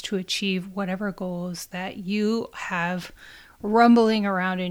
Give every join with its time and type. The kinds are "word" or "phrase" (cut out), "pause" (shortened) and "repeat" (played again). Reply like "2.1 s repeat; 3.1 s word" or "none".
none